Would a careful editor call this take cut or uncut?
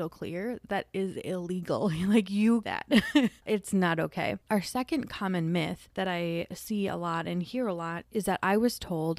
cut